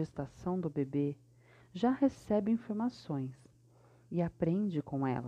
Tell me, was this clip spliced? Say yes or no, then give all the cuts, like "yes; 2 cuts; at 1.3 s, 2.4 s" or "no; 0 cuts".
no; 0 cuts